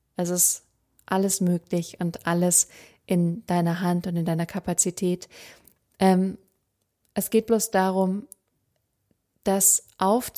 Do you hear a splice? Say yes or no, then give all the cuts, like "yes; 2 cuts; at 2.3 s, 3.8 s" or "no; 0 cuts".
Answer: no; 0 cuts